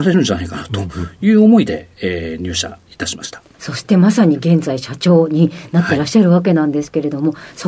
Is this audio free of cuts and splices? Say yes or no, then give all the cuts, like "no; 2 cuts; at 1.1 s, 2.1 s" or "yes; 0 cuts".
yes; 0 cuts